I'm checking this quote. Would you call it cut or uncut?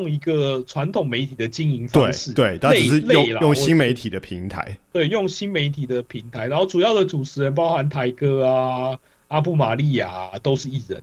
cut